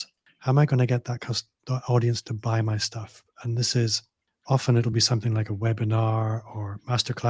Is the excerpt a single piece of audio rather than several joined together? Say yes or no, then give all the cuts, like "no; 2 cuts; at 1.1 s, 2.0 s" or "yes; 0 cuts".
yes; 0 cuts